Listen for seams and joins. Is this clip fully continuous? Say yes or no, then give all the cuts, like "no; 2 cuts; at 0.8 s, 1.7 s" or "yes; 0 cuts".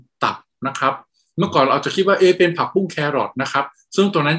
yes; 0 cuts